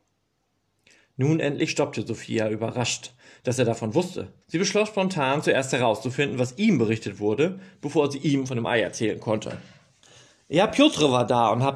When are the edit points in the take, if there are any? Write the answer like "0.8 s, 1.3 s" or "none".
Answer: 4.4 s, 10.0 s